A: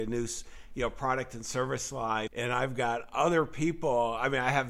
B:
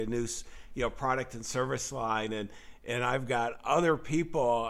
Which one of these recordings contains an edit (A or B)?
A